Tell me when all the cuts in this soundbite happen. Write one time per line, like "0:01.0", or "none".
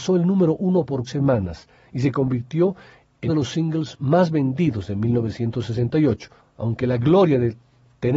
0:01.1
0:03.3
0:06.4